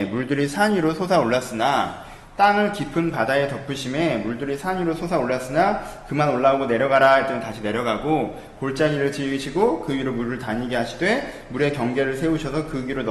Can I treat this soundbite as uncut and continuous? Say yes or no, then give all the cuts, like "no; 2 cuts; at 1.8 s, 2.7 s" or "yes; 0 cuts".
yes; 0 cuts